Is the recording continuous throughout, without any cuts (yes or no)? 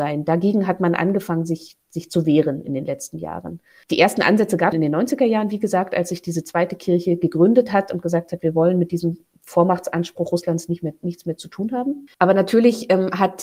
no